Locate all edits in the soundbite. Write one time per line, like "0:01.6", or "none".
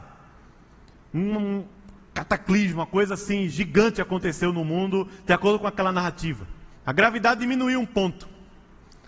0:06.8